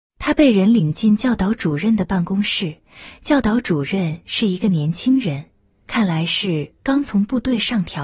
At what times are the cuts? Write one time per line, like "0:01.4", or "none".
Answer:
none